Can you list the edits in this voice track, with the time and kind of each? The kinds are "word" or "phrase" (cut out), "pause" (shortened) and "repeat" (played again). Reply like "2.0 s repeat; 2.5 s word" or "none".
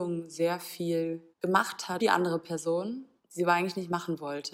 1.3 s pause; 2.0 s word; 3.2 s pause